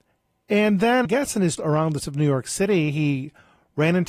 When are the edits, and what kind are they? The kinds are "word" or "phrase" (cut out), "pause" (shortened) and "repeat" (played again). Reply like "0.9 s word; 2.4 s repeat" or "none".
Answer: 1.0 s word; 1.6 s word; 2.0 s word